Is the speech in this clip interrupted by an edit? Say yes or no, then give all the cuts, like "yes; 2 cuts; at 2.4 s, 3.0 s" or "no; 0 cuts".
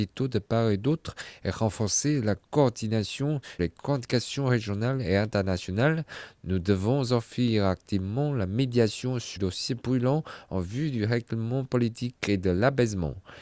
yes; 2 cuts; at 3.6 s, 9.4 s